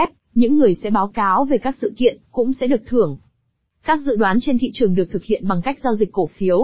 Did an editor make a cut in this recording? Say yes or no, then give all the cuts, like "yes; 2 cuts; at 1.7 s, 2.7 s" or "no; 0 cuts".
no; 0 cuts